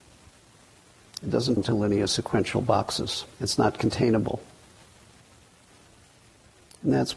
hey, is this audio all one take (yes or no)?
no